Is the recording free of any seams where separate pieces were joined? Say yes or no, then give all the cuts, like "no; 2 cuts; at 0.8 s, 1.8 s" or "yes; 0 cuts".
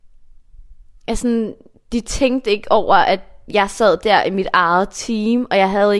yes; 0 cuts